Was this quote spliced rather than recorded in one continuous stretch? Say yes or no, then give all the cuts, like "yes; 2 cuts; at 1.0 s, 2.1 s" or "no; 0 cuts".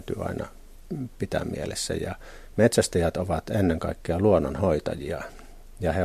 no; 0 cuts